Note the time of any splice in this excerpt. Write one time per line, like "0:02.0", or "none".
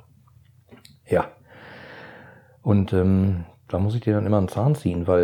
none